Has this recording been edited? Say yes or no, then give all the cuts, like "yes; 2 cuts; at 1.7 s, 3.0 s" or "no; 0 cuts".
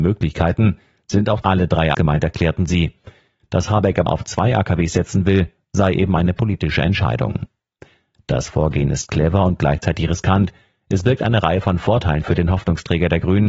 yes; 3 cuts; at 1.4 s, 1.9 s, 4.1 s